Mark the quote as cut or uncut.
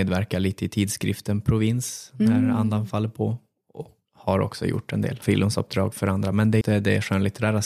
cut